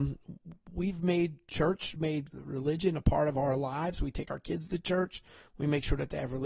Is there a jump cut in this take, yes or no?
yes